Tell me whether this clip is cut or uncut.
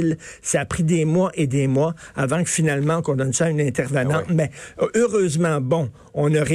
uncut